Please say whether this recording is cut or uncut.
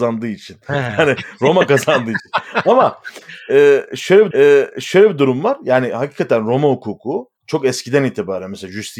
cut